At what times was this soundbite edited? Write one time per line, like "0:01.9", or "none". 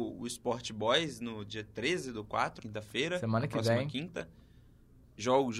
0:02.6